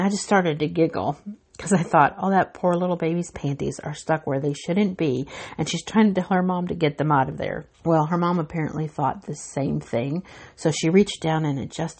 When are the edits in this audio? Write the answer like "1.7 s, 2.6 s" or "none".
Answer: 7.7 s